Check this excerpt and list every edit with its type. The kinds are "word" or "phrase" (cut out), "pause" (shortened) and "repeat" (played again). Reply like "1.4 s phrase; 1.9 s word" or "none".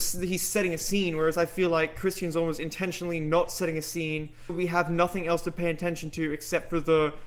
4.5 s word